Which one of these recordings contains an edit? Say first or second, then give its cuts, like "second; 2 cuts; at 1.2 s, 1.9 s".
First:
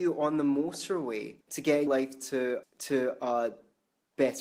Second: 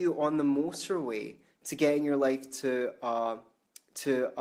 first; 3 cuts; at 1.4 s, 1.9 s, 2.6 s